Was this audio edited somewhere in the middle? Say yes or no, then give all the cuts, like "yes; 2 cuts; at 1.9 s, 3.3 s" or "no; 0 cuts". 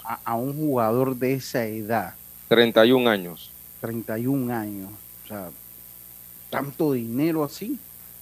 no; 0 cuts